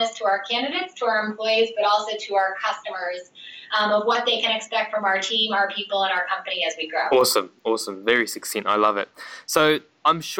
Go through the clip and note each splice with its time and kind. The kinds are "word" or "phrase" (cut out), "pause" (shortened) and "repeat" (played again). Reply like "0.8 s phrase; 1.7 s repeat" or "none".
none